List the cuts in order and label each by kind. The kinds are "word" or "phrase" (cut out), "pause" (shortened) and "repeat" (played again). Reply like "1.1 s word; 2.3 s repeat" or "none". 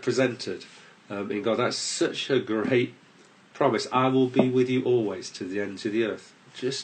none